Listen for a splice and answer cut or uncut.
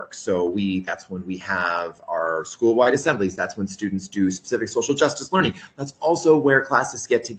uncut